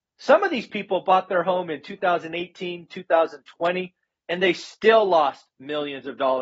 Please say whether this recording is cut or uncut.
uncut